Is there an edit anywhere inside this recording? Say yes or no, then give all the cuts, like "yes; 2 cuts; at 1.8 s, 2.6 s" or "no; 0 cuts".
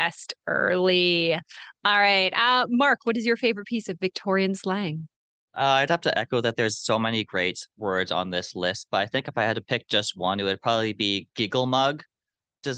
yes; 1 cut; at 7.7 s